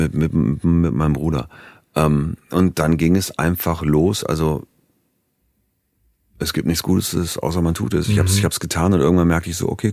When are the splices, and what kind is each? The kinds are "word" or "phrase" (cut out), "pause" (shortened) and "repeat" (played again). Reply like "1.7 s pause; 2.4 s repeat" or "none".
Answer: none